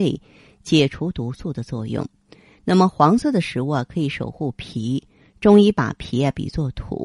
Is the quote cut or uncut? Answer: uncut